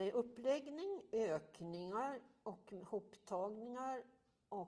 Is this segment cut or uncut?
uncut